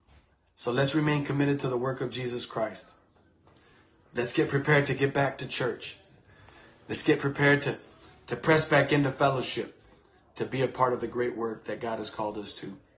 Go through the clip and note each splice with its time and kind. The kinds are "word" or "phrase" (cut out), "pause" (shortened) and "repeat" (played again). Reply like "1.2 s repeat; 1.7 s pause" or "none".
none